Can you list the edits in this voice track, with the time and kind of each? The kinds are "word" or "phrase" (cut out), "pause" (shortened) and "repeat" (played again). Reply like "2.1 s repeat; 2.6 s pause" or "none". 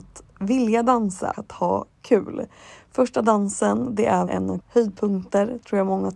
1.3 s word; 4.3 s word; 4.6 s word